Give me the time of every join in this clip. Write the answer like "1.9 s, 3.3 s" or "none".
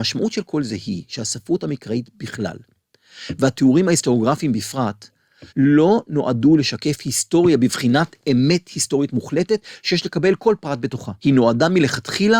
5.5 s, 11.2 s